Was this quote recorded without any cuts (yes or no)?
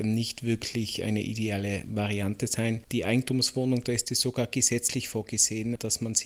yes